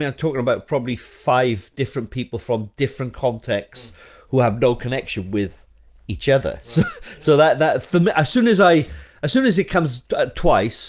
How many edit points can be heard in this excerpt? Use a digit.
0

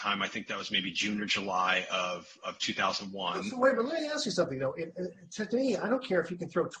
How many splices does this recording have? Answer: 0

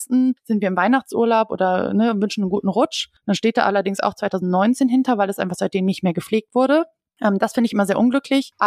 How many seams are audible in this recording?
0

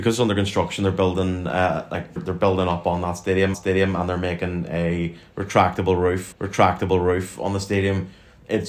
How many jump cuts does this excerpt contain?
3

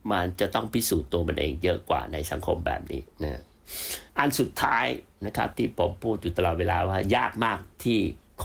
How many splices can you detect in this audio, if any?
2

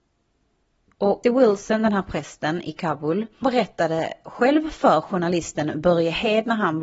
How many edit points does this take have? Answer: 2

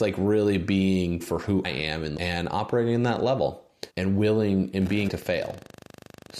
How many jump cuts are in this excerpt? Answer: 5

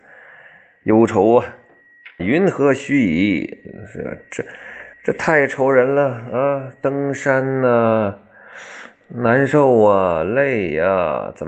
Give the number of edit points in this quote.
2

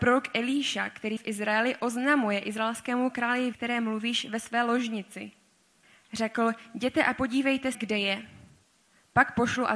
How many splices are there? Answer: 4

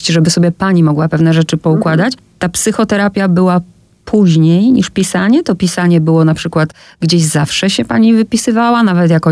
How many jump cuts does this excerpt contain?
0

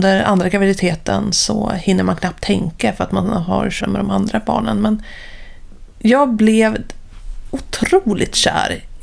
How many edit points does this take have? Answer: 1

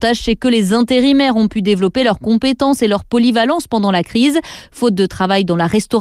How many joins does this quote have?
0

